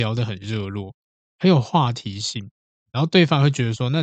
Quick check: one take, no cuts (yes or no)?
yes